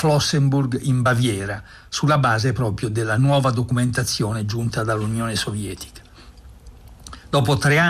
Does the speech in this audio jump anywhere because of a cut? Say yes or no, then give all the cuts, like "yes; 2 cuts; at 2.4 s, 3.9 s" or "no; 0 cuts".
no; 0 cuts